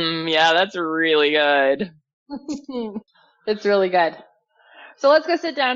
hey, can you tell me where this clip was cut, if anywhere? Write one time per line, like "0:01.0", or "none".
0:03.1